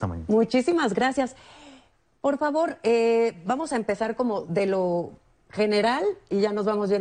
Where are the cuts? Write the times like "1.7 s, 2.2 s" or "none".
none